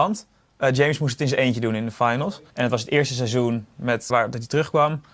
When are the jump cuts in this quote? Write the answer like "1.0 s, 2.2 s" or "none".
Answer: 2.5 s, 4.1 s